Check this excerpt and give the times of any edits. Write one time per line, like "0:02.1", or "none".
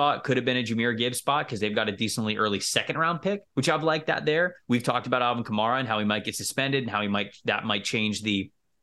0:03.5